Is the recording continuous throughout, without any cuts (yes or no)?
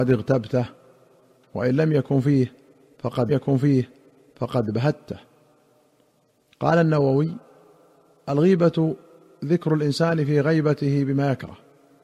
no